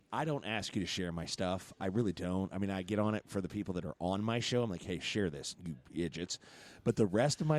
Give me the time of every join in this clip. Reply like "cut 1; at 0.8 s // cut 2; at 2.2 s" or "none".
none